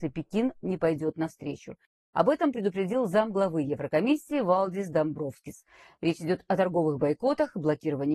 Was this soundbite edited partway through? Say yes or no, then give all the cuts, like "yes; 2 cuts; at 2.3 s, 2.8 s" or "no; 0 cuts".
no; 0 cuts